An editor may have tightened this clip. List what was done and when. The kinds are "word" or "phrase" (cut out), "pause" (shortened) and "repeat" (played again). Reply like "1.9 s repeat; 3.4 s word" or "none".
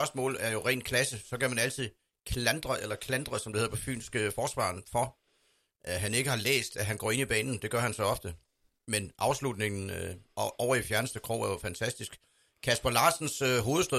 none

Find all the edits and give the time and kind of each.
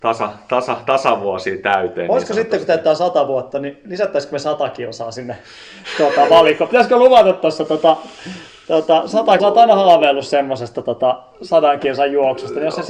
9.4 s phrase

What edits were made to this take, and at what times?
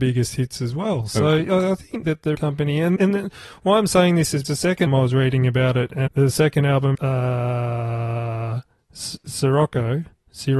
2.0 s word; 2.3 s word; 3.0 s word; 4.4 s word; 4.9 s word; 6.1 s word; 6.9 s word

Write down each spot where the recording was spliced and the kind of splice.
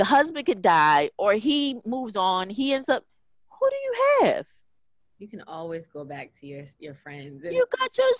none

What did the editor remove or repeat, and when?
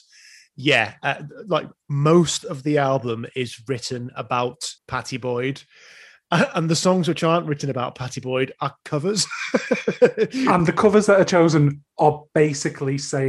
4.8 s pause

